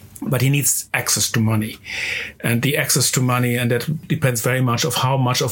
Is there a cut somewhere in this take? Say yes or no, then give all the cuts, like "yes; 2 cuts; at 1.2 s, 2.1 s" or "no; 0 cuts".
no; 0 cuts